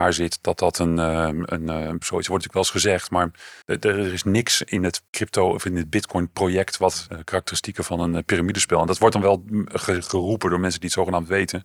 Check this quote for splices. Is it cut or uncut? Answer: cut